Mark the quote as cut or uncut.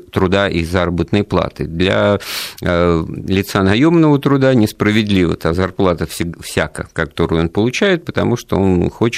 uncut